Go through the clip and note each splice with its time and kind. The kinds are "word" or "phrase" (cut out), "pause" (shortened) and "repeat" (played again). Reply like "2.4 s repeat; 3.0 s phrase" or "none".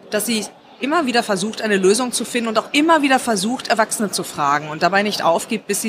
none